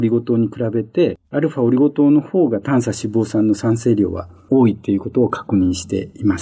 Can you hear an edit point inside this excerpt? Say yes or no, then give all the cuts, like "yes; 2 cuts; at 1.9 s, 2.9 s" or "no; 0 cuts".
yes; 1 cut; at 1.2 s